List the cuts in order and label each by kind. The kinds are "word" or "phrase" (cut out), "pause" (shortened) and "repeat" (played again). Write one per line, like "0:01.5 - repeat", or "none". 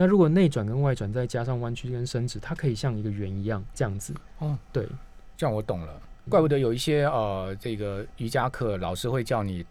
0:03.7 - word
0:05.3 - pause
0:06.3 - word

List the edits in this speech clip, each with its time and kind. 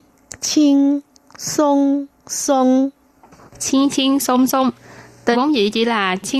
0:05.3 - word

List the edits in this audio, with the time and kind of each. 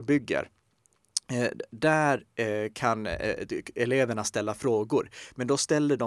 none

